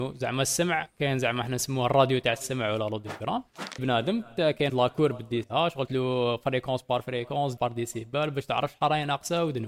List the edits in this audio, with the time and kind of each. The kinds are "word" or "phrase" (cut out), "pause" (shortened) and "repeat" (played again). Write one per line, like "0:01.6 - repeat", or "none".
0:03.8 - word
0:04.7 - word
0:05.4 - word
0:05.9 - word
0:07.6 - word

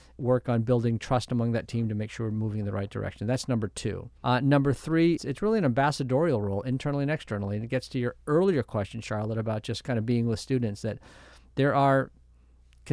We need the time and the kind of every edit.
0:04.2 - pause
0:05.2 - word

